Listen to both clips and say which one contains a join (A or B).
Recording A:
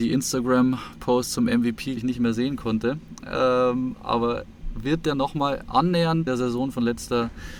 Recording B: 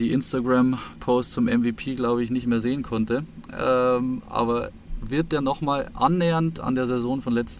A